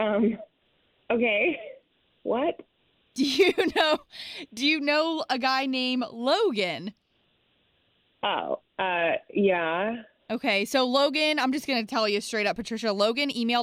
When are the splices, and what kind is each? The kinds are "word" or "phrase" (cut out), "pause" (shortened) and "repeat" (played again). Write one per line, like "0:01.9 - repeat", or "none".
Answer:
none

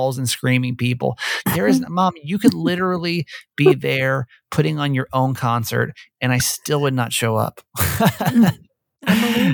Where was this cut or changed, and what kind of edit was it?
none

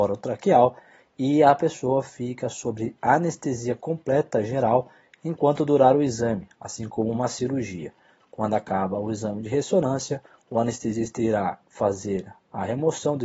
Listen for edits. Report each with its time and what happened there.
none

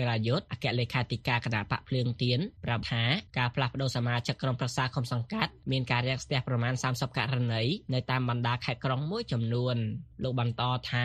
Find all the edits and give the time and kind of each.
0:02.8 - word

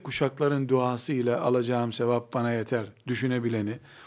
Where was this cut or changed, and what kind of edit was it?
none

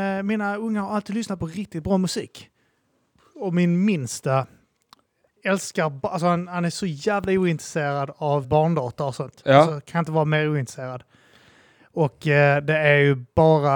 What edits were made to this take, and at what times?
0:08.4 - word

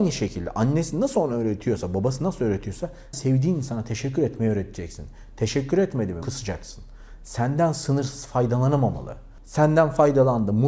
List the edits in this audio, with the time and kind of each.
0:03.1 - phrase
0:06.2 - word

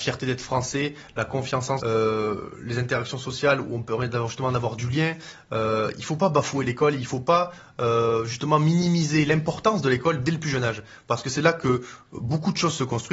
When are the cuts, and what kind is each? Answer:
0:01.8 - word

